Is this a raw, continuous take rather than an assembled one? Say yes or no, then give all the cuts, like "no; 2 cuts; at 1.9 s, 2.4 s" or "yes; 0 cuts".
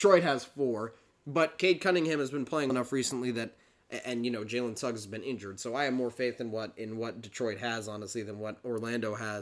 no; 1 cut; at 2.7 s